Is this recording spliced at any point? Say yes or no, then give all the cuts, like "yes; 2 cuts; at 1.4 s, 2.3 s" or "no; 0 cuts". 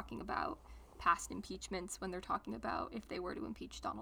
no; 0 cuts